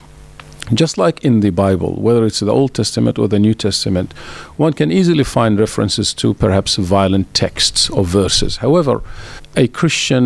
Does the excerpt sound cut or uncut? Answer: uncut